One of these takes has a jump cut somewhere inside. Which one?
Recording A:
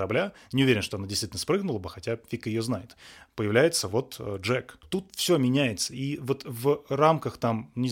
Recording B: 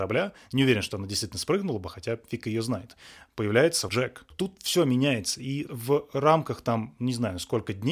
B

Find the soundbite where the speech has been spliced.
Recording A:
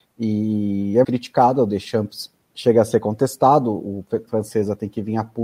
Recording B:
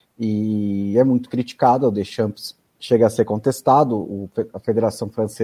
A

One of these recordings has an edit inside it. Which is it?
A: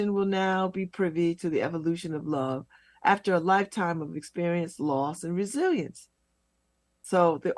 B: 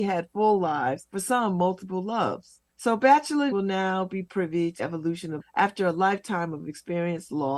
B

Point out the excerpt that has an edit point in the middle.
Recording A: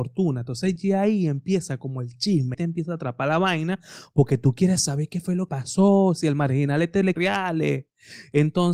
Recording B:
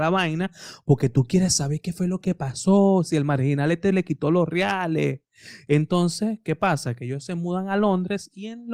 A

